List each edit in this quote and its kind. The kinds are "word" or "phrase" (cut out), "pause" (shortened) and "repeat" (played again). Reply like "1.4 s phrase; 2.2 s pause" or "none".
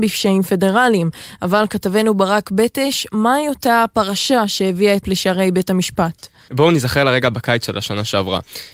5.0 s word